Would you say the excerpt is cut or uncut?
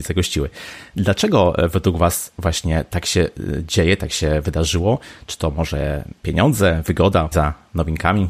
cut